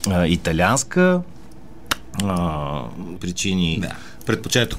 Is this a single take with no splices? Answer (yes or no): no